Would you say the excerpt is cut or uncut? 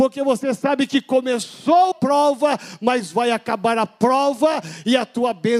cut